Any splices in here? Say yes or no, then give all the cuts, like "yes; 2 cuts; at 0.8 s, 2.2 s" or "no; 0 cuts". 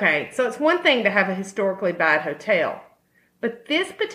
no; 0 cuts